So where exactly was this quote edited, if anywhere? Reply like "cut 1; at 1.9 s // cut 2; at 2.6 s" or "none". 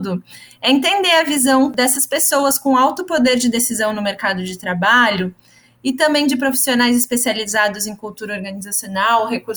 none